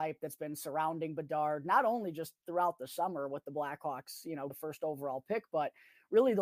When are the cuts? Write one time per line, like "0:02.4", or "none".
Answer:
0:04.5